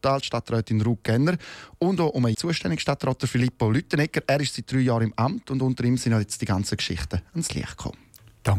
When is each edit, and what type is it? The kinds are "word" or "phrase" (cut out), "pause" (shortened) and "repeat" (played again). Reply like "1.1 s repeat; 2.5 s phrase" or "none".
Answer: 2.3 s word